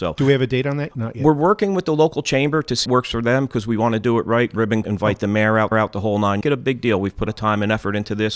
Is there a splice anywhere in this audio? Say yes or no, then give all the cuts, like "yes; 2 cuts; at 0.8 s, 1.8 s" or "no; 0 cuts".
yes; 6 cuts; at 0.9 s, 2.8 s, 4.8 s, 5.7 s, 6.4 s, 7.3 s